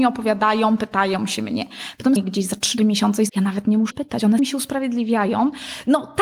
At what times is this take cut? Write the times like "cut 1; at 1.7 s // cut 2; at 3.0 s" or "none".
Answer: cut 1; at 2.2 s // cut 2; at 2.8 s // cut 3; at 3.3 s // cut 4; at 3.9 s // cut 5; at 4.4 s